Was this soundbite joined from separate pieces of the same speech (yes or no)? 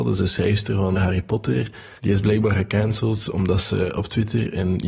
yes